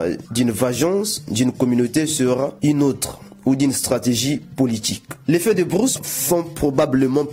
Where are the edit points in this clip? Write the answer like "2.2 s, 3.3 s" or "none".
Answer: none